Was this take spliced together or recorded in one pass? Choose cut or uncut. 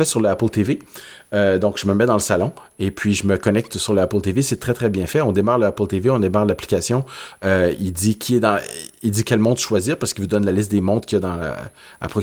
uncut